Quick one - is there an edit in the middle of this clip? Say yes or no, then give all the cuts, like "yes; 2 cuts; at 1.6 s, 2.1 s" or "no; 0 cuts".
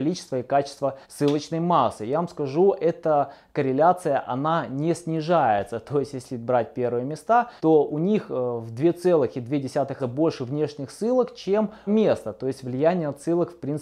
yes; 4 cuts; at 1.0 s, 7.6 s, 10.0 s, 11.9 s